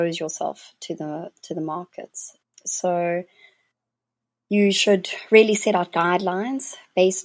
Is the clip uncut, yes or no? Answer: yes